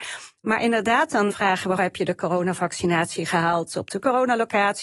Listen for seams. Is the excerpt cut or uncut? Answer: cut